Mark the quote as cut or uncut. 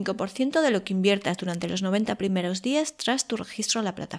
uncut